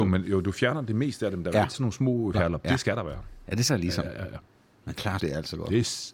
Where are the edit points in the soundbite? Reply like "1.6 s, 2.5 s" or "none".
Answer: 1.7 s, 2.3 s, 2.6 s, 3.7 s, 5.2 s